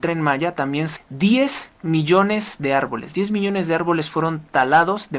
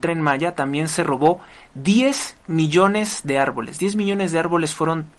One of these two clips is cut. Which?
first; 1 cut; at 1.0 s

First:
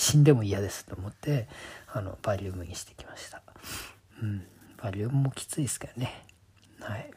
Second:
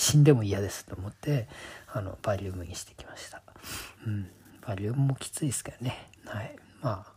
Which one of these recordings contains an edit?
second; 2 cuts; at 4.0 s, 6.2 s

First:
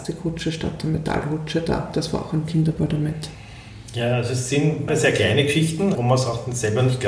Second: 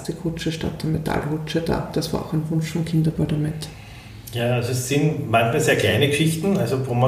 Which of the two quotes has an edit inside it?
first; 3 cuts; at 2.5 s, 4.9 s, 5.9 s

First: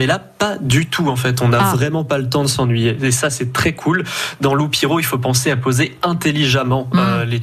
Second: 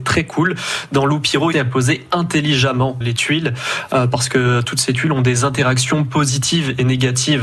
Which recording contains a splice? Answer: second; 2 cuts; at 1.5 s, 3.0 s

